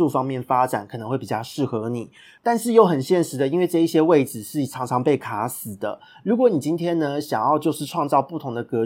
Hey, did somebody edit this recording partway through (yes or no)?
no